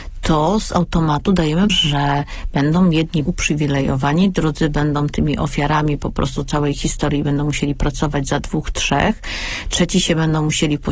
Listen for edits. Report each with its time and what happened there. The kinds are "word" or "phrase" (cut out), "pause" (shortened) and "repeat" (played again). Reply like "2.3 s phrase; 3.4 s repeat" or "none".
1.7 s word; 3.3 s word